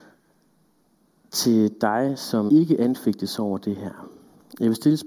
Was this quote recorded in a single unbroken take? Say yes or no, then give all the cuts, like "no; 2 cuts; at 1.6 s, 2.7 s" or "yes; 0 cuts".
no; 1 cut; at 2.5 s